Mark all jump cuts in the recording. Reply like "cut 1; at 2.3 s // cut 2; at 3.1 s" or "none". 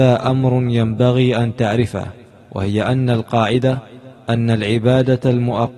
none